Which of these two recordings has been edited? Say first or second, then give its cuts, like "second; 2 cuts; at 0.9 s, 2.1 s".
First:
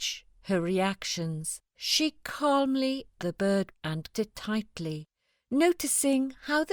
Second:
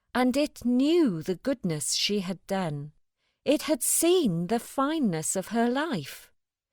first; 4 cuts; at 1.7 s, 3.2 s, 3.7 s, 4.1 s